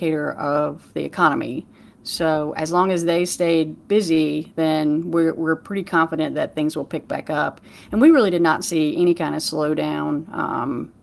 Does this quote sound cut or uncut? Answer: uncut